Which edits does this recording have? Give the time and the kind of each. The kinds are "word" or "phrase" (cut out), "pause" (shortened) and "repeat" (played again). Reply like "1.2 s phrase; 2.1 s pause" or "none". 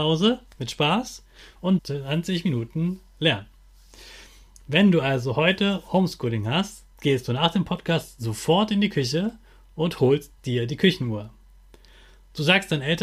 1.8 s phrase; 6.9 s pause